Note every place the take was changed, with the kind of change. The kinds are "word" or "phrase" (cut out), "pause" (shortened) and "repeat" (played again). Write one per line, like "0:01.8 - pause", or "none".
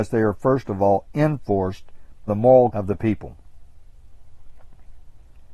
0:02.3 - word
0:02.7 - word